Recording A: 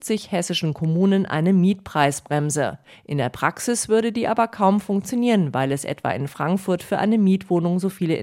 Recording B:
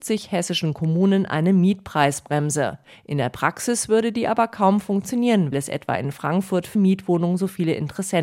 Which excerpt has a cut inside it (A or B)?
B